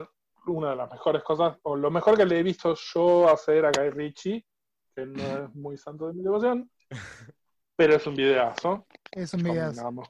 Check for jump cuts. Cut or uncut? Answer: uncut